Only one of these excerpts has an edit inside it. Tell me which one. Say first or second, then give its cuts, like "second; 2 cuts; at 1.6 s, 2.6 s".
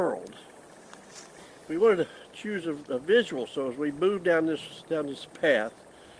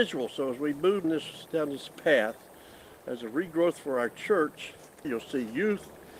second; 2 cuts; at 1.0 s, 4.9 s